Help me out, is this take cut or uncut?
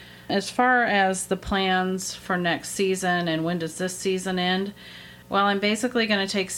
cut